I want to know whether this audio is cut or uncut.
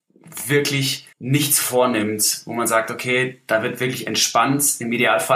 cut